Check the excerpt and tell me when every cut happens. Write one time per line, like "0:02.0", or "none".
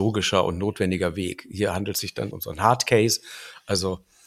0:02.3